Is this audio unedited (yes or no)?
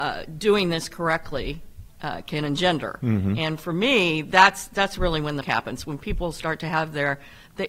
no